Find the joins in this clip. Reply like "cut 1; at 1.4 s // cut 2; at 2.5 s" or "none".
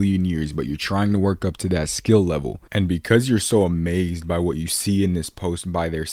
cut 1; at 2.7 s